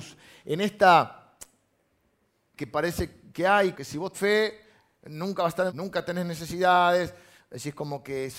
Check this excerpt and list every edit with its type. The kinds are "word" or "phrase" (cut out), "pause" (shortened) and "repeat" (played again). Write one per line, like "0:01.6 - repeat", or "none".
0:02.6 - word
0:03.7 - word
0:04.1 - word
0:05.7 - word